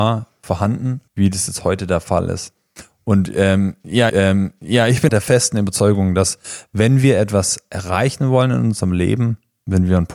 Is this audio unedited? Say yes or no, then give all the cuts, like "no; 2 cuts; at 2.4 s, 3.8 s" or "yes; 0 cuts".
no; 3 cuts; at 1.1 s, 4.1 s, 5.1 s